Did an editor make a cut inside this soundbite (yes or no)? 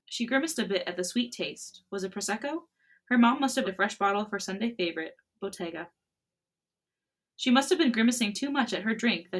yes